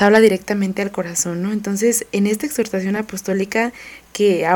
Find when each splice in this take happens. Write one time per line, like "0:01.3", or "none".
none